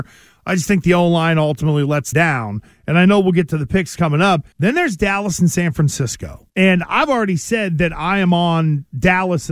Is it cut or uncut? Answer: cut